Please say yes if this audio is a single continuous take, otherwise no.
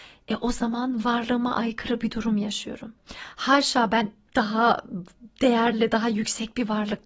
yes